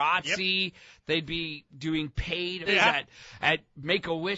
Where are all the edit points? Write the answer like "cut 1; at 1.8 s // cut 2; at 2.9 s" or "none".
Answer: cut 1; at 2.7 s